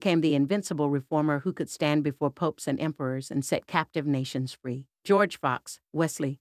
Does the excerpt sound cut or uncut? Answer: uncut